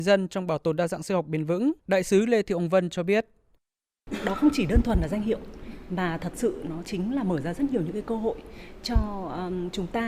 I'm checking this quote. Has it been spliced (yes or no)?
yes